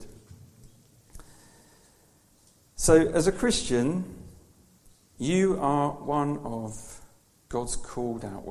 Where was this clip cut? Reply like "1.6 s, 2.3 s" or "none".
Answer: none